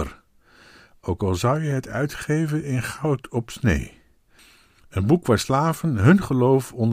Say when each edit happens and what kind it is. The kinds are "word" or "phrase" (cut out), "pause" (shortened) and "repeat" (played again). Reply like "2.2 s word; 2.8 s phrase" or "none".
none